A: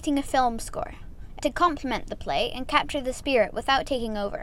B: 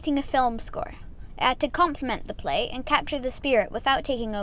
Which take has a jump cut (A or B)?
A